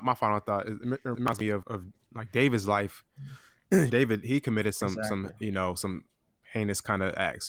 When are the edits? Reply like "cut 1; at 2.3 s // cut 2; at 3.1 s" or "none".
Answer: cut 1; at 1.6 s // cut 2; at 3.9 s